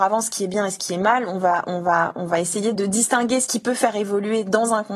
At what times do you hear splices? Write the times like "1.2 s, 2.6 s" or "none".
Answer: none